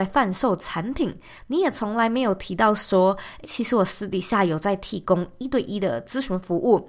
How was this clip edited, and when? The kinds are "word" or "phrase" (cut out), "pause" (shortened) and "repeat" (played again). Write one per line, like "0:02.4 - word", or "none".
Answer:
0:03.4 - word